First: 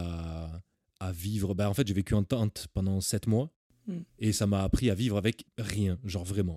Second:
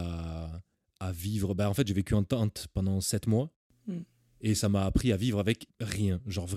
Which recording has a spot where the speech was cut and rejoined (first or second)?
first